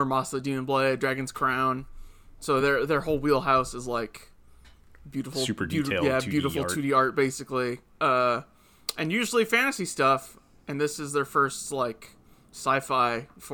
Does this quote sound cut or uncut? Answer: uncut